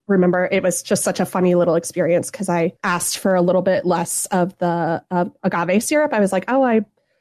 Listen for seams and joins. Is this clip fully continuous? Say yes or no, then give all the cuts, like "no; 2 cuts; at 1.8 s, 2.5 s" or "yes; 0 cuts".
yes; 0 cuts